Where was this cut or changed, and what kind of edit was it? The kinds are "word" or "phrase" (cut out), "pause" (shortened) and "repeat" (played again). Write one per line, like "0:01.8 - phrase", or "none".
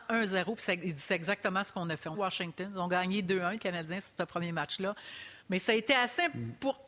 0:02.1 - phrase
0:05.4 - pause